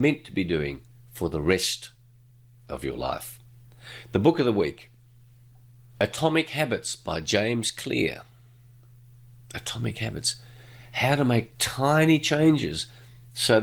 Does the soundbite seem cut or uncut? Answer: uncut